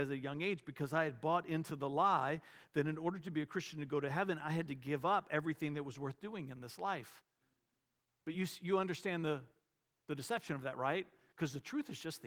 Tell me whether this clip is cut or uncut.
uncut